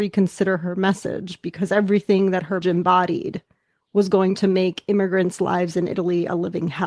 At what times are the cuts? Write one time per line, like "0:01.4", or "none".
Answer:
0:02.6